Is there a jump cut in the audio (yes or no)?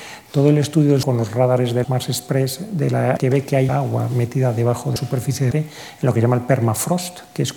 yes